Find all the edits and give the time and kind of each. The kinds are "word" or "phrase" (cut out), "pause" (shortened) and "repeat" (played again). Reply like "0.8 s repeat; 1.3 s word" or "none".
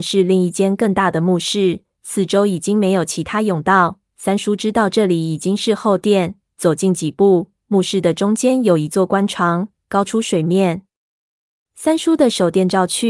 none